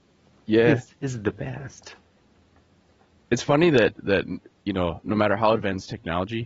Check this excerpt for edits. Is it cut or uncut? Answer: uncut